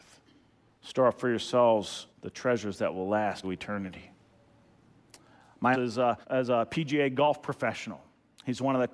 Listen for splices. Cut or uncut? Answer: cut